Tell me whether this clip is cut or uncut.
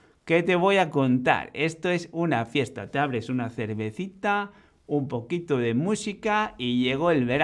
uncut